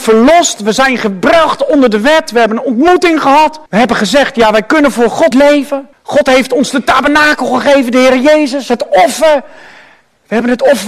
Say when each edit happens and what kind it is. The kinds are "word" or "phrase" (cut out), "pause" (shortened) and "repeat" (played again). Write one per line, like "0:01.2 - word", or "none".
0:03.7 - pause
0:05.3 - word
0:05.9 - pause